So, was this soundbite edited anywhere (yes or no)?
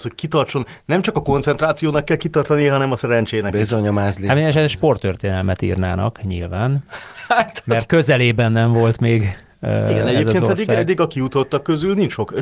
no